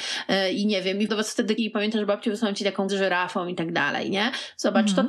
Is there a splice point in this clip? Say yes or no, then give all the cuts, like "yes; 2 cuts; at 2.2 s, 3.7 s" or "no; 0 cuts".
yes; 3 cuts; at 1.1 s, 1.6 s, 2.9 s